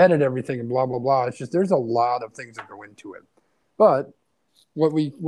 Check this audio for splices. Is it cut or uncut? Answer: uncut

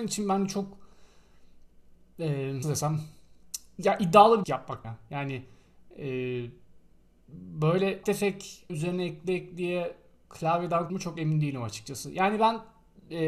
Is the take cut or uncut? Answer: cut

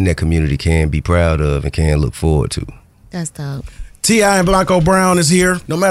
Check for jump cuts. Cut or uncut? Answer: uncut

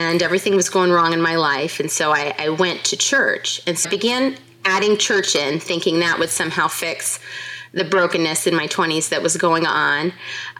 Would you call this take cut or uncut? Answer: cut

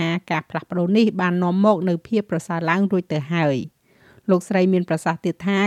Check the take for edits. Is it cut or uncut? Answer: uncut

